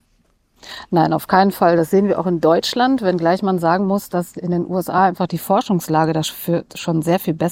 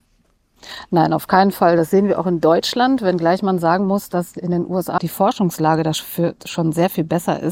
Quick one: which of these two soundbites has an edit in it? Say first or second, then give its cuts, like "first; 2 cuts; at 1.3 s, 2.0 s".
second; 1 cut; at 5.0 s